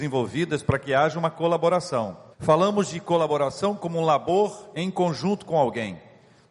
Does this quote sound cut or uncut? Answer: cut